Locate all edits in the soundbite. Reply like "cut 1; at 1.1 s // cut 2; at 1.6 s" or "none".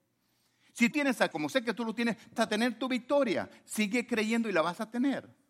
cut 1; at 0.9 s // cut 2; at 1.3 s // cut 3; at 2.4 s

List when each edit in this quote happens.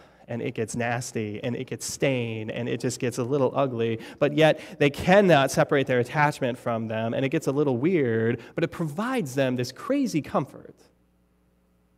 none

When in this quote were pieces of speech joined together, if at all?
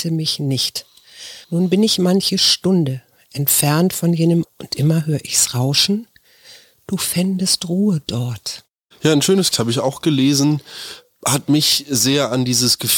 cut 1; at 1.4 s // cut 2; at 4.4 s // cut 3; at 9.5 s

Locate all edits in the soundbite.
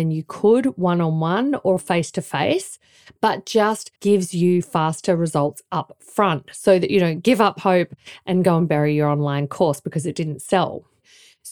cut 1; at 4.0 s

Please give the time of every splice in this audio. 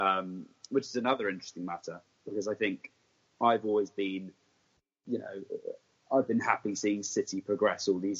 none

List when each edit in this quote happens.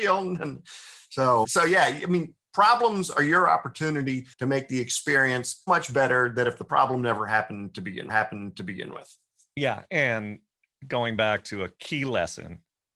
cut 1; at 1.4 s // cut 2; at 4.3 s // cut 3; at 5.7 s // cut 4; at 8.1 s

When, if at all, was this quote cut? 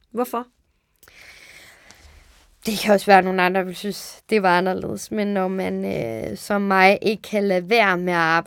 none

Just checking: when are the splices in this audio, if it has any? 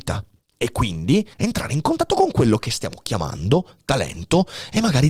cut 1; at 1.3 s

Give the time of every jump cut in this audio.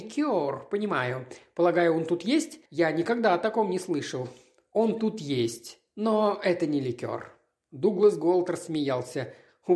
cut 1; at 2.7 s

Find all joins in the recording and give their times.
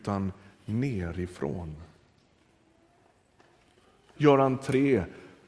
cut 1; at 4.2 s

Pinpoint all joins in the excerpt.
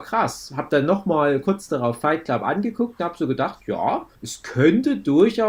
cut 1; at 4.1 s

